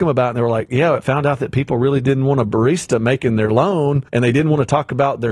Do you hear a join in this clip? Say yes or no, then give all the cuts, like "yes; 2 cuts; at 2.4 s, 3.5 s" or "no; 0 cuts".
yes; 1 cut; at 4.1 s